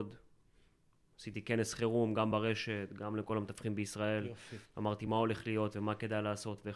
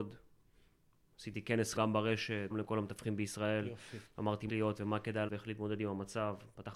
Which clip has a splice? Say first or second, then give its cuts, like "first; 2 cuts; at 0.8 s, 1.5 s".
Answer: second; 4 cuts; at 1.8 s, 2.5 s, 4.5 s, 5.3 s